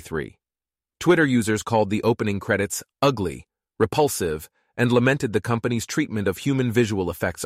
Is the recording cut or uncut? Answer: uncut